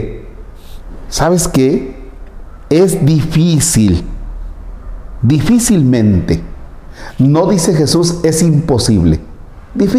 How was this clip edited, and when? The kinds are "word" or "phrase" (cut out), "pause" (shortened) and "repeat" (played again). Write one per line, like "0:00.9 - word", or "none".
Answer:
none